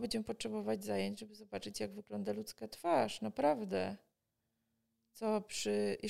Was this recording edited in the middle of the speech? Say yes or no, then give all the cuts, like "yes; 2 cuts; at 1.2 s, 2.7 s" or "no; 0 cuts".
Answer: no; 0 cuts